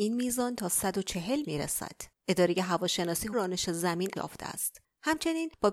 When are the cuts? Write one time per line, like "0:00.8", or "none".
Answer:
0:01.4
0:02.2
0:03.3
0:04.2